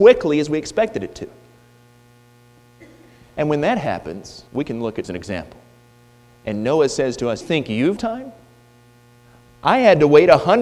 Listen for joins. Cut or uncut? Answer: cut